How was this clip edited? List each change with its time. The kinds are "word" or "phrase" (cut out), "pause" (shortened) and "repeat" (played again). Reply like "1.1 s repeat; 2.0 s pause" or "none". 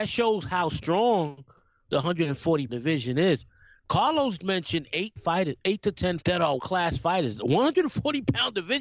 2.7 s word; 4.4 s word; 5.2 s word; 6.2 s word; 6.6 s word

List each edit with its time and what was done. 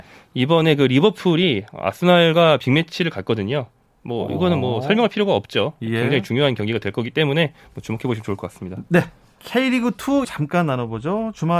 10.2 s word

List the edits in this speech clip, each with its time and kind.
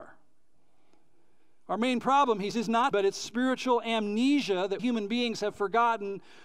2.5 s word; 2.9 s word; 4.8 s word

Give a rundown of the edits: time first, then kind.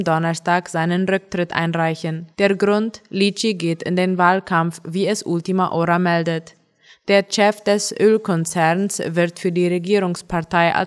2.3 s pause

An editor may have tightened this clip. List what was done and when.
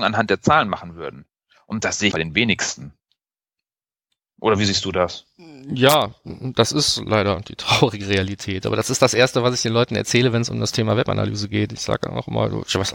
2.1 s word

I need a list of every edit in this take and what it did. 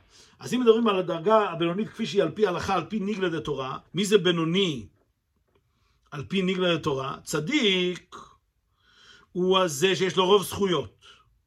3.9 s pause

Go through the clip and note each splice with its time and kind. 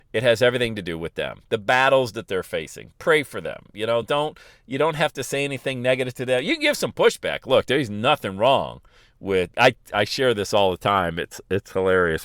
none

